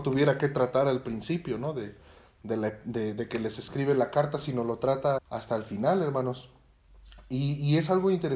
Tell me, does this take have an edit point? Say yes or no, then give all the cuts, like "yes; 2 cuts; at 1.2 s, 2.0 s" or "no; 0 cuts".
yes; 1 cut; at 5.2 s